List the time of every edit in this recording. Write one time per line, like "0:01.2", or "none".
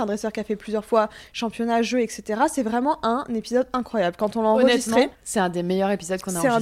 0:05.1